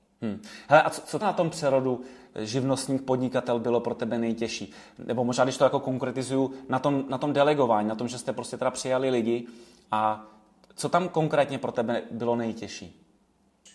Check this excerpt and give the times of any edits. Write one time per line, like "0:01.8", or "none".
0:01.2